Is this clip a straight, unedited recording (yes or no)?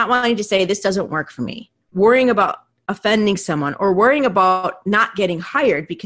no